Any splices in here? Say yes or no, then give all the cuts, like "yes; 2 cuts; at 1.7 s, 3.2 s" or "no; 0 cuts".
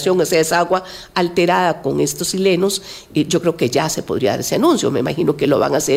no; 0 cuts